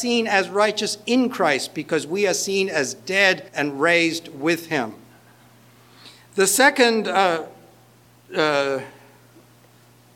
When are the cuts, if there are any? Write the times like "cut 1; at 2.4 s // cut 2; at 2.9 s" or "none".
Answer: cut 1; at 3.5 s // cut 2; at 8.0 s